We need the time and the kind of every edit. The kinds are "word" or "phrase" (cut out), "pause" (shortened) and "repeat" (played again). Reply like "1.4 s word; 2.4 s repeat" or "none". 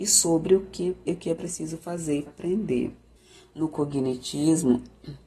1.1 s word; 2.3 s word; 3.2 s pause

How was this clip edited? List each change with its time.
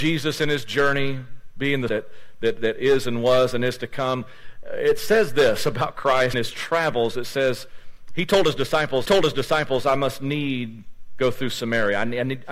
1.9 s phrase; 6.3 s phrase; 9.1 s repeat

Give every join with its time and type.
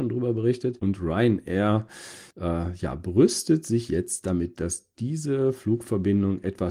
2.3 s pause

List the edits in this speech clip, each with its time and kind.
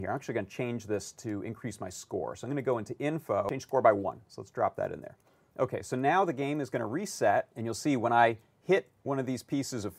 7.5 s pause

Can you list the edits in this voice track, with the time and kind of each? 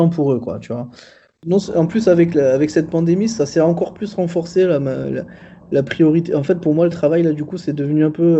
none

